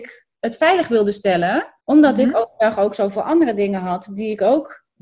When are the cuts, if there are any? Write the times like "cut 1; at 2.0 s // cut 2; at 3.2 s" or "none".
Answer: cut 1; at 1.8 s